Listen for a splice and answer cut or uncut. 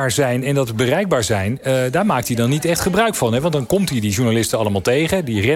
uncut